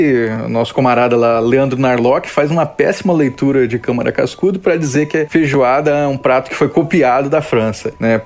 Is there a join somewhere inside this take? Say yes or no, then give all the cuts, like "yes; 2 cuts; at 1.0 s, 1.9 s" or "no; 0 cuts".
no; 0 cuts